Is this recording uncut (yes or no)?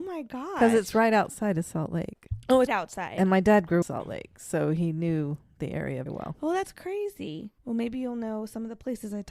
no